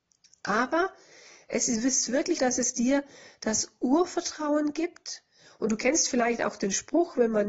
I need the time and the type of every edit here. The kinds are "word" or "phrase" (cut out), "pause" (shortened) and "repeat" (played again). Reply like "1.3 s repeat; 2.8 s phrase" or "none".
2.4 s word